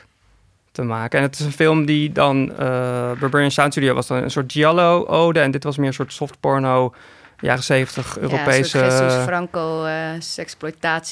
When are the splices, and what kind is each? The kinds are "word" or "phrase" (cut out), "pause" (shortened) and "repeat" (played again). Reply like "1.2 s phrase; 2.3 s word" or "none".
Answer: none